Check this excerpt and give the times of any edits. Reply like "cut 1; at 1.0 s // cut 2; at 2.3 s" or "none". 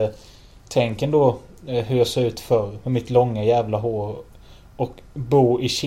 none